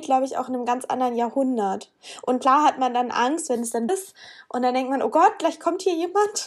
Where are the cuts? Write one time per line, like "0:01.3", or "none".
0:03.9